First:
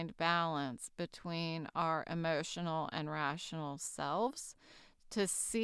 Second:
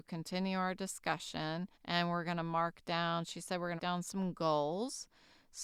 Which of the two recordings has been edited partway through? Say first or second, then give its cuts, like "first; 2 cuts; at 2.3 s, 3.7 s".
second; 2 cuts; at 1.7 s, 3.8 s